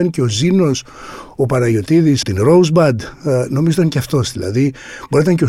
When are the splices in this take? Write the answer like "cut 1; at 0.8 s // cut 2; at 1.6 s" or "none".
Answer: cut 1; at 2.2 s